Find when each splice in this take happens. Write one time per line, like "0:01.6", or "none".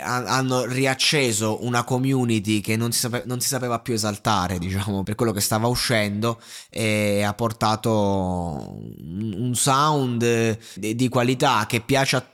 0:05.1
0:10.8